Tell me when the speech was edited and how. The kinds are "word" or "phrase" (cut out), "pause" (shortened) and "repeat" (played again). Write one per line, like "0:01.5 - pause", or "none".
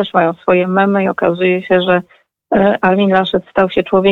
none